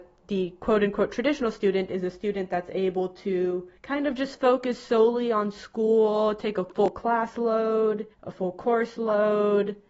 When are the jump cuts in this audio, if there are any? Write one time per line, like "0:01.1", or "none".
0:03.8
0:08.1